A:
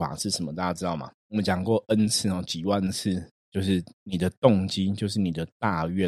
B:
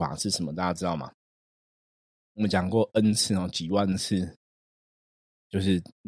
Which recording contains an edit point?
A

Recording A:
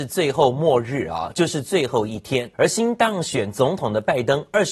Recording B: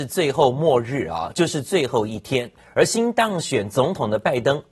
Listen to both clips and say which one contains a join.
A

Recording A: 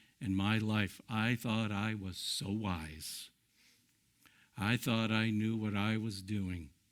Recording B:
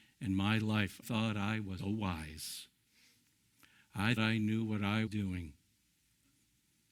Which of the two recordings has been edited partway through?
B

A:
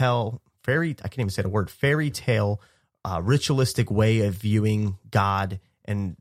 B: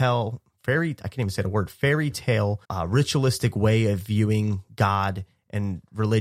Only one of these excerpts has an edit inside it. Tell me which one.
B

